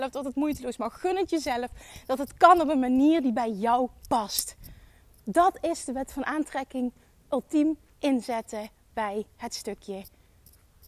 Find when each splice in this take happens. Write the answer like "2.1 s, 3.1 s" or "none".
none

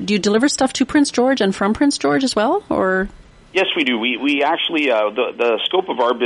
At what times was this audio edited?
none

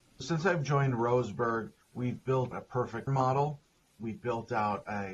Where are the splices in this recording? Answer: 1.8 s, 2.5 s, 3.1 s

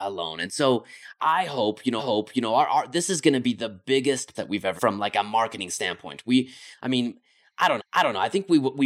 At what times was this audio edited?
2.0 s, 4.3 s, 4.8 s, 7.8 s

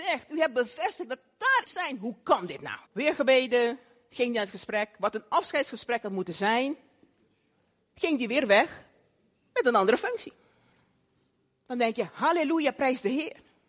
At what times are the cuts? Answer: 1.7 s, 2.9 s

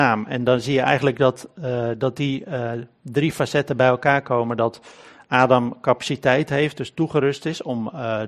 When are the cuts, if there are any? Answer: none

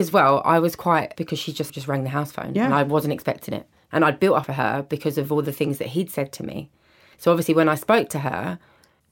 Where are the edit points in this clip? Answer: 1.2 s, 1.7 s, 4.4 s

